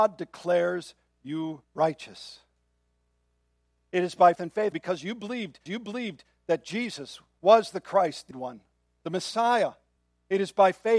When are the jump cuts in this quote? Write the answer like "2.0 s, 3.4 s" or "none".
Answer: 1.6 s, 4.4 s, 4.7 s, 5.7 s, 8.3 s, 10.0 s